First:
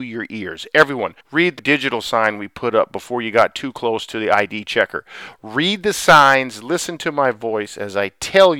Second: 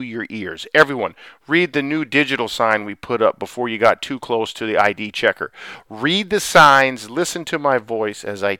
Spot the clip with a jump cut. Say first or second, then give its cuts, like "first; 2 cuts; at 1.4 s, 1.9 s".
first; 2 cuts; at 1.2 s, 1.6 s